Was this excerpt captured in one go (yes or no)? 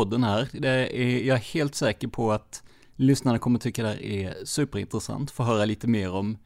yes